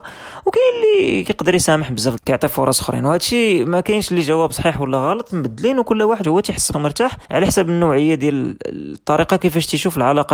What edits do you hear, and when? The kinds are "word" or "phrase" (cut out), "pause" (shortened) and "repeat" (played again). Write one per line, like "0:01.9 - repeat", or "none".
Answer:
0:02.2 - phrase
0:05.3 - word
0:06.2 - word
0:06.7 - word
0:07.2 - pause